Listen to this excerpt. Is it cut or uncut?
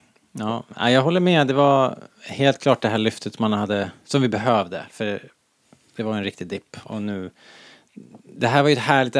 uncut